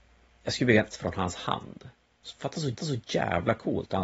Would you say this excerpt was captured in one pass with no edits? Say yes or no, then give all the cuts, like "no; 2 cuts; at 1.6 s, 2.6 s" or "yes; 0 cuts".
no; 2 cuts; at 0.9 s, 2.8 s